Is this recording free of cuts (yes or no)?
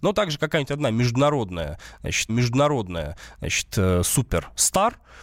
no